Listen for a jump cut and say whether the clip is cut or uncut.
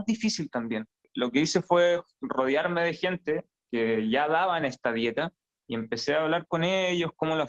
uncut